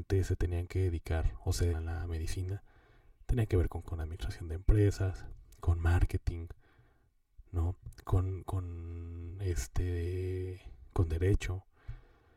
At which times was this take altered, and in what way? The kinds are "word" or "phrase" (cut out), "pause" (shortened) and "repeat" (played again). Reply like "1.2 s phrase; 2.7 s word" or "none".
1.7 s word; 3.8 s word; 8.4 s word